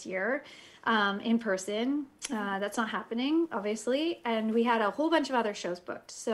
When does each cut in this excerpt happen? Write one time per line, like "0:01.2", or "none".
none